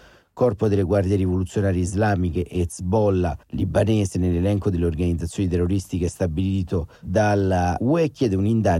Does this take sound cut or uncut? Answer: cut